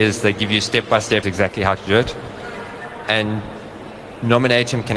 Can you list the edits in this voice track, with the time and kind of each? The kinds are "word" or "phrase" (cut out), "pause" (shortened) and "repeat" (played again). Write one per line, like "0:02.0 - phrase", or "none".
0:01.2 - word